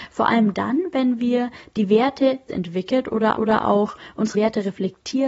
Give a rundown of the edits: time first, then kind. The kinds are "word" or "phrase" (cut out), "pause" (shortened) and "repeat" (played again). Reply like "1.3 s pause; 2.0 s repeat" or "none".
2.5 s phrase; 3.4 s repeat; 4.3 s word